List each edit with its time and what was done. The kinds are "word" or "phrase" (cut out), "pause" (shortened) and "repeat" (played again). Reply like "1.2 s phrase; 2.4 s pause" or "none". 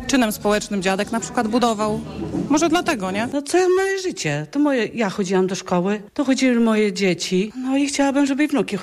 none